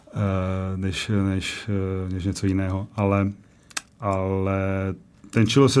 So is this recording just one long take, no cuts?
yes; 0 cuts

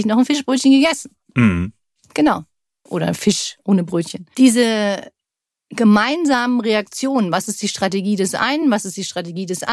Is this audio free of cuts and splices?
yes; 0 cuts

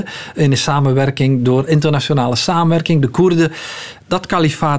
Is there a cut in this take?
yes; 1 cut; at 1.7 s

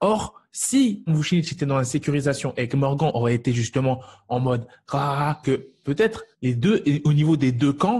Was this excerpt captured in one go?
no; 3 cuts; at 1.1 s, 5.4 s, 6.3 s

